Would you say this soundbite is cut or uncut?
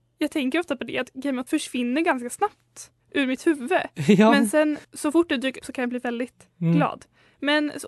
cut